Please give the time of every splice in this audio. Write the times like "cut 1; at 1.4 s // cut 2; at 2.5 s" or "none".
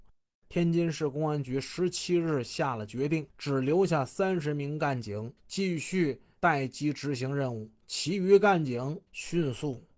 cut 1; at 3.3 s // cut 2; at 5.4 s // cut 3; at 9.1 s